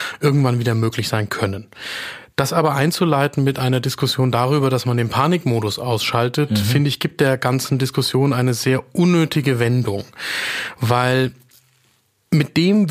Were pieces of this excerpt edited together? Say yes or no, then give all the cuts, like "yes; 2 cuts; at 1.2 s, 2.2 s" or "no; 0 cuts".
no; 0 cuts